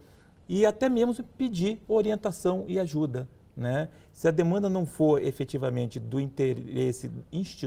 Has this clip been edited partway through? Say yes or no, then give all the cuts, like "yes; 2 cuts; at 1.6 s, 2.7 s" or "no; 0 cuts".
yes; 1 cut; at 1.8 s